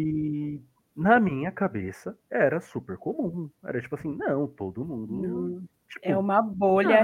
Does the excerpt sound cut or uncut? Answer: uncut